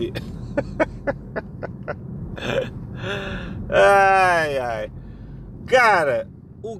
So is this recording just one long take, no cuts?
yes; 0 cuts

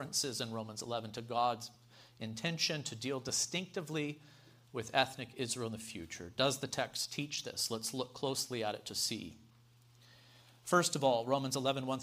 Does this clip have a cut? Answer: no; 0 cuts

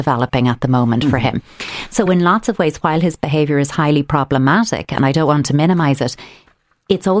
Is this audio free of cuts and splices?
yes; 0 cuts

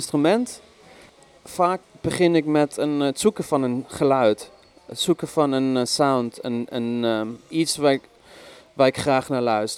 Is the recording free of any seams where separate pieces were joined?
yes; 0 cuts

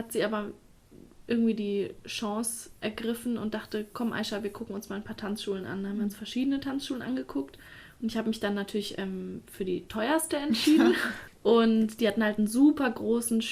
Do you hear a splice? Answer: no; 0 cuts

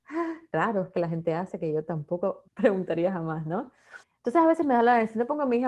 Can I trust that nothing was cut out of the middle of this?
no; 2 cuts; at 2.5 s, 4.0 s

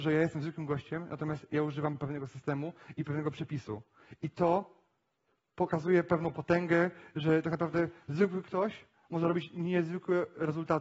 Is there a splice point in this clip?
no; 0 cuts

